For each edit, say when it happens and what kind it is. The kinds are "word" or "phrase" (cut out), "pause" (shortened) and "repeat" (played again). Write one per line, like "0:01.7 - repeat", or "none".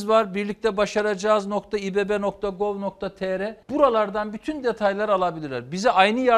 0:03.6 - pause